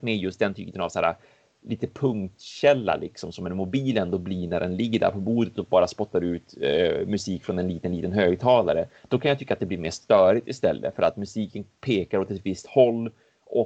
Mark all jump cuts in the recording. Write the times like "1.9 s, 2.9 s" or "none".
none